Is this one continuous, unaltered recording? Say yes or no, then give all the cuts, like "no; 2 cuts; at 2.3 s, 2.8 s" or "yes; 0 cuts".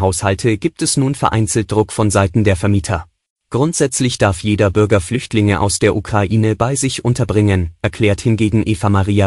no; 1 cut; at 3.2 s